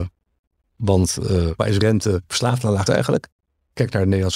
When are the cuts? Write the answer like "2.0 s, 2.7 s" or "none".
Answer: 1.6 s, 2.9 s